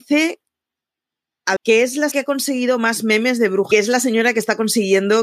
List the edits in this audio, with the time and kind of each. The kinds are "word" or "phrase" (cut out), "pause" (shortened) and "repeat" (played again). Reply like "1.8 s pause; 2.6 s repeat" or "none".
1.6 s word; 2.1 s word; 3.7 s phrase